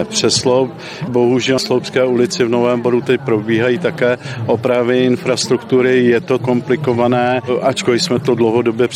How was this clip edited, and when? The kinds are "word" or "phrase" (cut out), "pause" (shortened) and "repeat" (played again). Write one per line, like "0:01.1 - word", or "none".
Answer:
0:01.1 - word
0:01.6 - word
0:06.4 - word